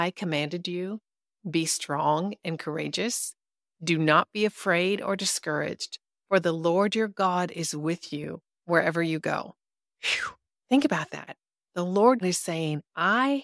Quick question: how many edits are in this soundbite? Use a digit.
1